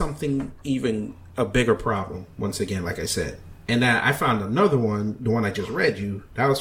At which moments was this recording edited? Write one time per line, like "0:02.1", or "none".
0:03.5